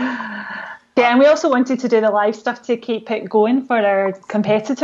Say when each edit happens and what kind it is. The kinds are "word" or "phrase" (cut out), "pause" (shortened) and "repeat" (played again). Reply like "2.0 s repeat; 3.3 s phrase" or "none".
1.0 s word